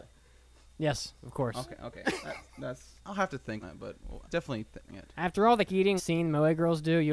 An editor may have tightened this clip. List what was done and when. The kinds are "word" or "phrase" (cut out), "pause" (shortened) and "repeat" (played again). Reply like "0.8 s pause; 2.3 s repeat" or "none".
3.0 s pause; 3.6 s word; 4.2 s word; 4.9 s word; 5.7 s word; 6.0 s word

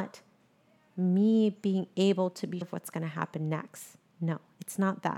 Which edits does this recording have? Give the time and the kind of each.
2.6 s word

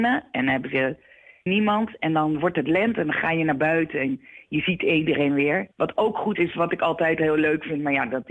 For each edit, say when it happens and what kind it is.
1.5 s phrase; 5.7 s pause; 6.3 s word

